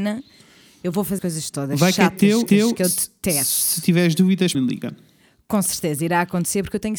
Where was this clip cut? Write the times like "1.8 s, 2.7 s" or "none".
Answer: 1.2 s, 2.5 s, 4.5 s